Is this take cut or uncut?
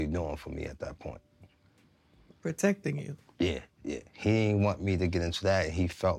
uncut